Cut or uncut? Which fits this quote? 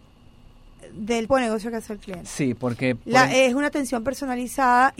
cut